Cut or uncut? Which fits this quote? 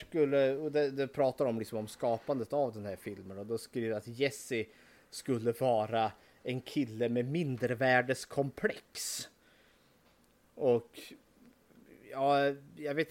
uncut